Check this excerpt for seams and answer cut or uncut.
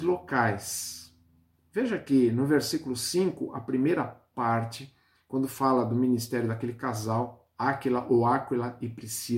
uncut